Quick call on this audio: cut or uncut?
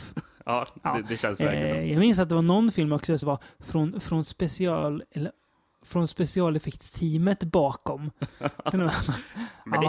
cut